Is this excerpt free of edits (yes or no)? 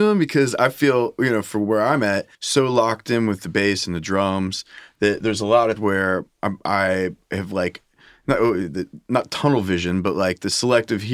no